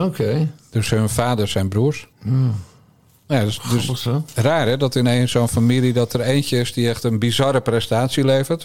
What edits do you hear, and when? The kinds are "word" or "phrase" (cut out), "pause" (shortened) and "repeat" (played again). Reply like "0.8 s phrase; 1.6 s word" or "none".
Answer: 2.1 s pause